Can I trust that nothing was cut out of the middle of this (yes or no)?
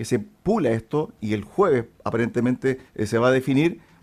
no